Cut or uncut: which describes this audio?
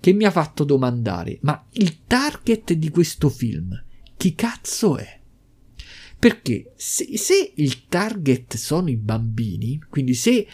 uncut